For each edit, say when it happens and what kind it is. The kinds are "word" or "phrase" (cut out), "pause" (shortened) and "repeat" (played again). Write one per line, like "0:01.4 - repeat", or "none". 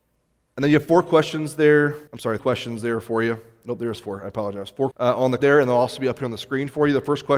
0:02.1 - pause
0:02.4 - word
0:04.9 - word
0:05.4 - word